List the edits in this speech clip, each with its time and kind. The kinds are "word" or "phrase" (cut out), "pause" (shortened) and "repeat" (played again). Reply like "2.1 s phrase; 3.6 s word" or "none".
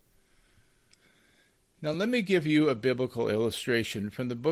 none

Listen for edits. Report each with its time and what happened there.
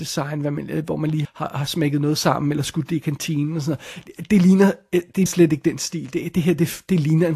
1.2 s word; 5.3 s word

